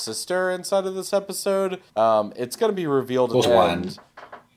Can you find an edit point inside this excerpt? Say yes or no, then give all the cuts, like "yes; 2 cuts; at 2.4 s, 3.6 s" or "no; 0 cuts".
yes; 2 cuts; at 1.9 s, 3.4 s